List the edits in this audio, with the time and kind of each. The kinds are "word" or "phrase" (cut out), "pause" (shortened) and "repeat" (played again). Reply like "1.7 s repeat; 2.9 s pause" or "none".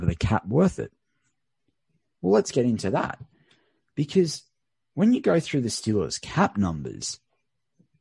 none